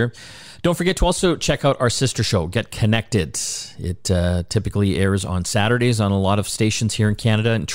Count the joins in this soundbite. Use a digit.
0